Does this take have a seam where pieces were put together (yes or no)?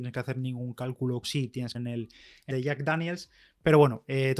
yes